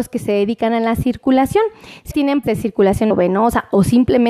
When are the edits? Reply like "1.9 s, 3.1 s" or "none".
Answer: 2.1 s, 2.4 s, 3.1 s